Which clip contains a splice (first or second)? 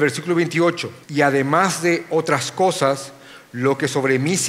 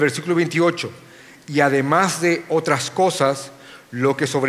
first